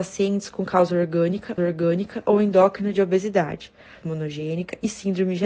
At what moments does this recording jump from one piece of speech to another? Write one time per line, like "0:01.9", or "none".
0:01.6
0:04.0